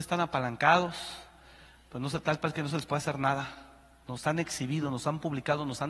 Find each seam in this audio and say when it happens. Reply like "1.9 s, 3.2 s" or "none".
none